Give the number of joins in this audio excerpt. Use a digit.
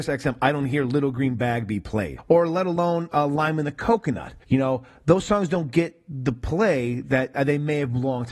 1